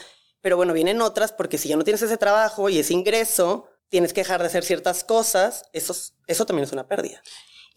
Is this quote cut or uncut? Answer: cut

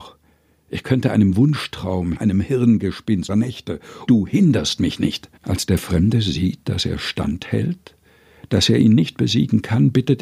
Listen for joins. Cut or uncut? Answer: cut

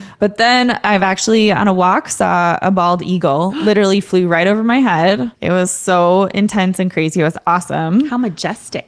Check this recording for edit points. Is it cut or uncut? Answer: uncut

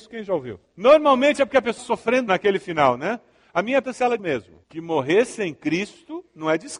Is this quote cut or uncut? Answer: cut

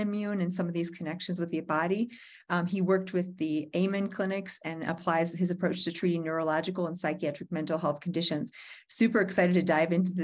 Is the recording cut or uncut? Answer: uncut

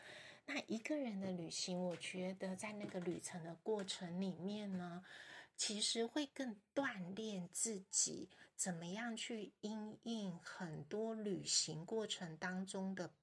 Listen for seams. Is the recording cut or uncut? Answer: uncut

